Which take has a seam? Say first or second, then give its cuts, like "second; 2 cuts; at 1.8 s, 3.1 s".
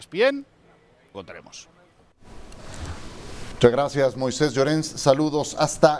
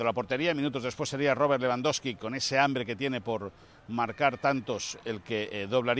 first; 1 cut; at 1.1 s